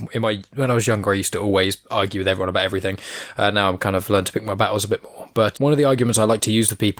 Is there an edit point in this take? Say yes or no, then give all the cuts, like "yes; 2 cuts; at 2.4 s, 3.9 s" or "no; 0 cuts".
yes; 1 cut; at 5.6 s